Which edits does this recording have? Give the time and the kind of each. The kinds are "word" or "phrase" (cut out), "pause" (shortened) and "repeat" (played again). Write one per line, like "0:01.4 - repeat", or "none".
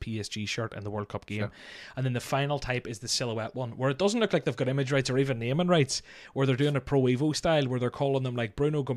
none